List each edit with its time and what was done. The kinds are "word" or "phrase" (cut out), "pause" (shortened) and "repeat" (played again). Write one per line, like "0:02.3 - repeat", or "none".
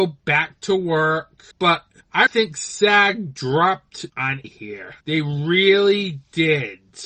0:01.5 - pause
0:02.3 - word
0:04.1 - phrase
0:04.4 - word
0:05.0 - pause